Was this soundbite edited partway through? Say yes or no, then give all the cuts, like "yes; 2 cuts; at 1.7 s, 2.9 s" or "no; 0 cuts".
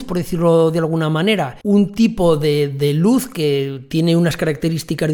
yes; 1 cut; at 1.6 s